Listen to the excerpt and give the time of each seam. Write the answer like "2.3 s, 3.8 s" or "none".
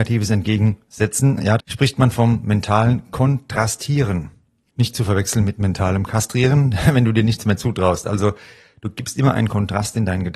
1.6 s